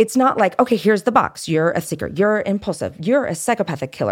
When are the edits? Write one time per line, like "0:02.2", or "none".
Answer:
0:01.8